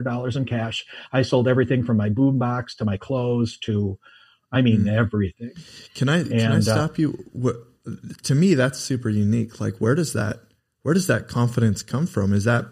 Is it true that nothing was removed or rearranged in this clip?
yes; 0 cuts

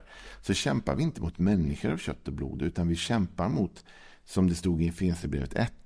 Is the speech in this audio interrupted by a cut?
no; 0 cuts

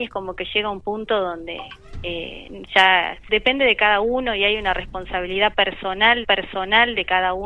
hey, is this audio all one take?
no; 2 cuts; at 3.3 s, 6.2 s

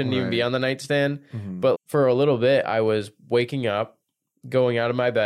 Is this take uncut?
no; 1 cut; at 1.7 s

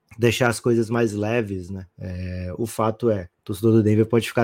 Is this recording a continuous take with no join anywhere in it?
no; 2 cuts; at 1.9 s, 3.3 s

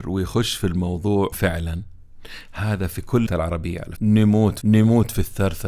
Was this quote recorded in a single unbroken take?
no; 4 cuts; at 1.3 s, 3.3 s, 4.0 s, 4.6 s

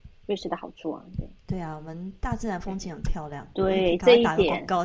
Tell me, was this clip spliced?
yes; 1 cut; at 1.4 s

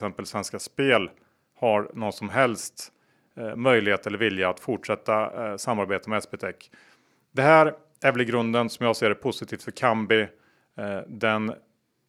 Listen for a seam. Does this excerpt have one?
no; 0 cuts

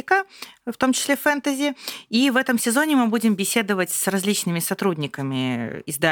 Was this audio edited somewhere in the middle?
no; 0 cuts

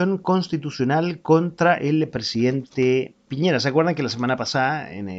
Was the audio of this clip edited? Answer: yes; 1 cut; at 3.3 s

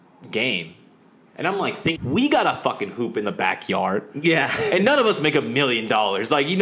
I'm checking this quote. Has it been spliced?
yes; 1 cut; at 2.0 s

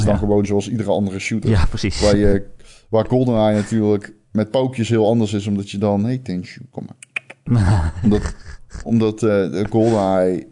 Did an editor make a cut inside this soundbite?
no; 0 cuts

